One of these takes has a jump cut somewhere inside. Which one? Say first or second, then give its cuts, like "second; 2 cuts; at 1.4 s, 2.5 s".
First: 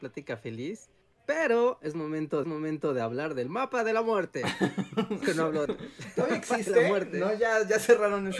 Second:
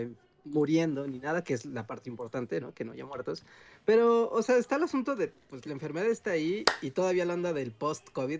first; 3 cuts; at 2.4 s, 5.2 s, 5.7 s